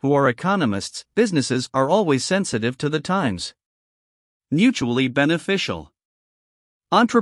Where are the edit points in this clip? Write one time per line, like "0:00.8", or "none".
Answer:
0:01.1